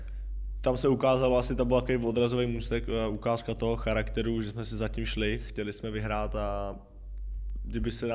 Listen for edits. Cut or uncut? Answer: uncut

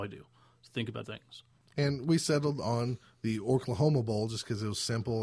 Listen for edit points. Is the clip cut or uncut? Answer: cut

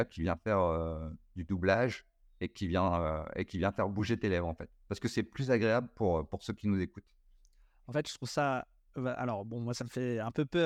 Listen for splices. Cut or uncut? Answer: uncut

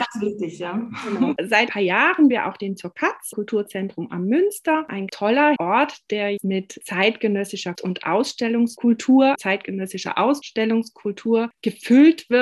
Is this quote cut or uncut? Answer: cut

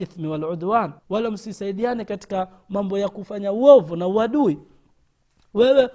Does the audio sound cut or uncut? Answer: cut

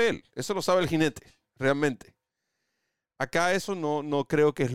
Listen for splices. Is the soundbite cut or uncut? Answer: uncut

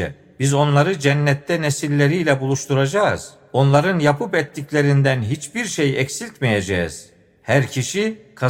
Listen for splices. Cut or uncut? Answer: uncut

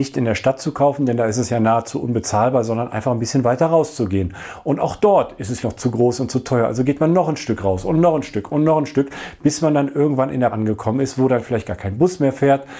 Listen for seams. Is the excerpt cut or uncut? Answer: cut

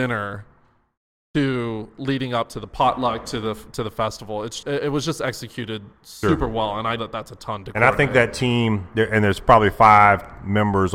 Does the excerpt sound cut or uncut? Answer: cut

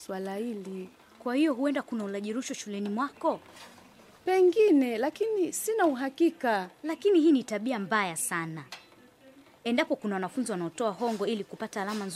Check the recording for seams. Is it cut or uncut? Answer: uncut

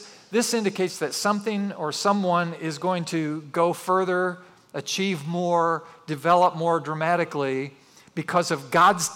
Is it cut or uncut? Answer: uncut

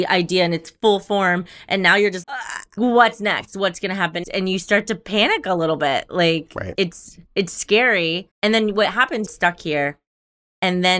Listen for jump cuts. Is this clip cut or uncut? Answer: cut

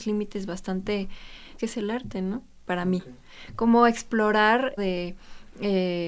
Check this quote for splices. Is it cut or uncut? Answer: cut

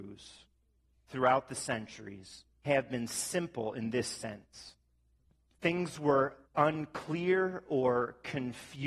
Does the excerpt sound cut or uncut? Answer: cut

